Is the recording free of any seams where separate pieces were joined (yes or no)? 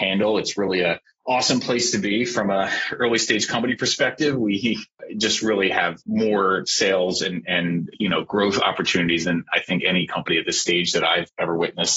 yes